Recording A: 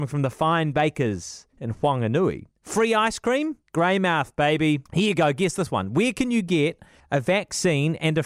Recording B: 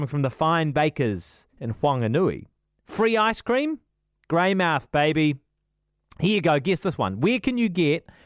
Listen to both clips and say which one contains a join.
A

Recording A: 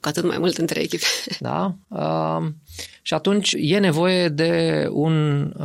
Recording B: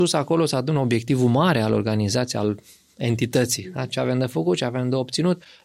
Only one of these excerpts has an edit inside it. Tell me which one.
A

